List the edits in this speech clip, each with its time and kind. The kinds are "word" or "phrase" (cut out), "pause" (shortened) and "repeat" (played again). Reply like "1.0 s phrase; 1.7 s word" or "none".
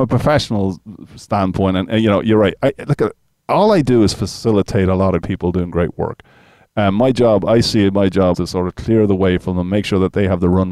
5.2 s word; 8.3 s word